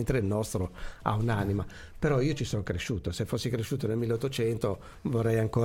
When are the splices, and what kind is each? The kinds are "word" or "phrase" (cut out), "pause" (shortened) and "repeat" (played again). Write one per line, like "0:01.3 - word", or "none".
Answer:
none